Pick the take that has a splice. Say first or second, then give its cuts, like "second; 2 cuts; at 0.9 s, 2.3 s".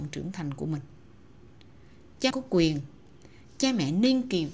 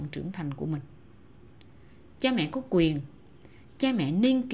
first; 1 cut; at 2.3 s